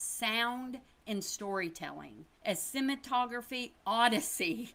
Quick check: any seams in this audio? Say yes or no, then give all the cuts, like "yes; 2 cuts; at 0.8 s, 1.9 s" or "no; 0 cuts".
yes; 1 cut; at 2.3 s